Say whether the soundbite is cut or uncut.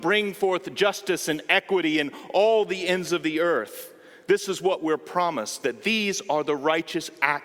uncut